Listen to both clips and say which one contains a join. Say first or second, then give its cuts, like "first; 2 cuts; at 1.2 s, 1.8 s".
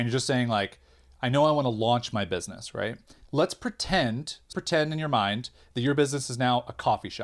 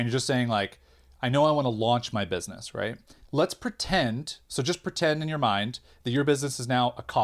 first; 1 cut; at 4.5 s